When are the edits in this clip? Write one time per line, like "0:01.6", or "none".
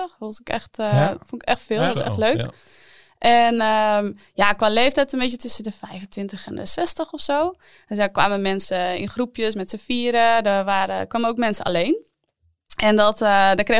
none